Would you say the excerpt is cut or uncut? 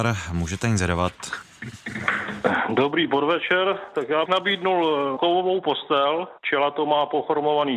cut